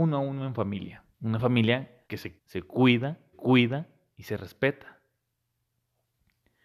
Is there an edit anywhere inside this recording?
yes; 4 cuts; at 1.1 s, 2.0 s, 2.4 s, 3.3 s

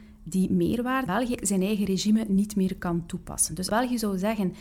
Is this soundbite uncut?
no; 3 cuts; at 1.1 s, 1.4 s, 3.7 s

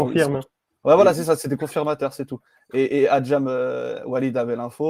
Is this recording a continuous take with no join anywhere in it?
yes; 0 cuts

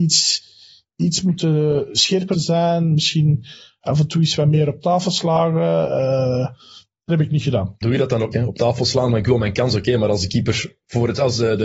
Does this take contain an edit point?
yes; 4 cuts; at 2.3 s, 7.1 s, 7.8 s, 8.3 s

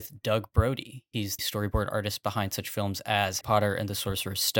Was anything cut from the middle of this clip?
yes; 2 cuts; at 1.4 s, 3.4 s

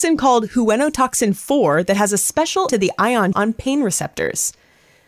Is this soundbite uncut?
no; 2 cuts; at 2.7 s, 3.3 s

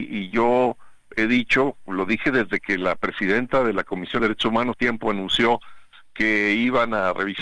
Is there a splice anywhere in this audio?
yes; 3 cuts; at 1.1 s, 4.2 s, 4.7 s

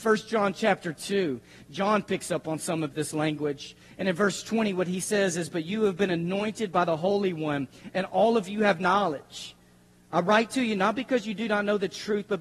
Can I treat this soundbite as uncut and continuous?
yes; 0 cuts

